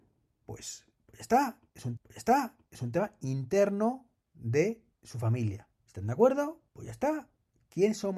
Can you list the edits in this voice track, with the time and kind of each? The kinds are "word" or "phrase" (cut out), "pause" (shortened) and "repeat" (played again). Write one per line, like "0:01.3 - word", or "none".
0:02.0 - repeat
0:04.9 - pause
0:05.8 - pause
0:06.7 - pause